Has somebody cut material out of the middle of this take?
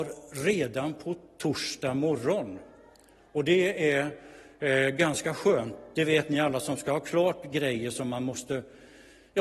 no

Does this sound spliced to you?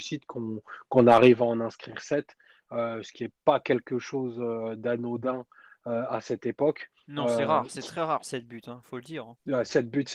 no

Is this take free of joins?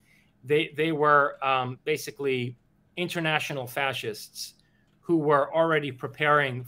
yes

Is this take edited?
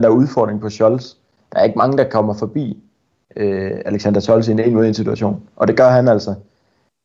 no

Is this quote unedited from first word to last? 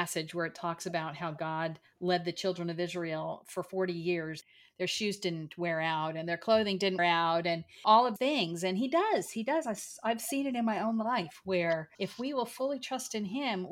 no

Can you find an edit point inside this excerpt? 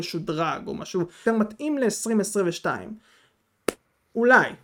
yes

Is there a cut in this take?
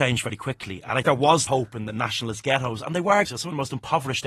yes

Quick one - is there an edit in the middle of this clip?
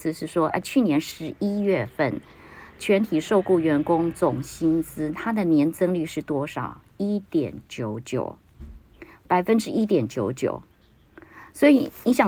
no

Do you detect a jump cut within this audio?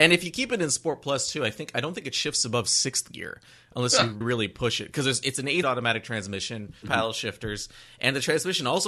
yes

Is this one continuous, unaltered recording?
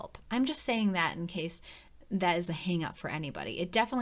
yes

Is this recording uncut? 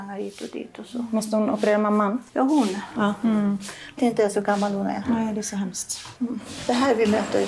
no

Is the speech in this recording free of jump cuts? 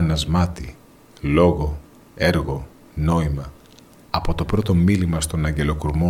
yes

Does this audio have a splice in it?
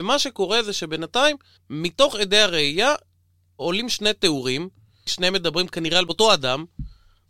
yes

